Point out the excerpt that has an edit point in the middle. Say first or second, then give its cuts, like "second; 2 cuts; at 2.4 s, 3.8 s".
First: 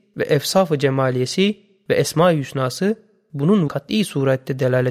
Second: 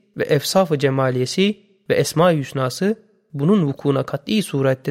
first; 1 cut; at 3.7 s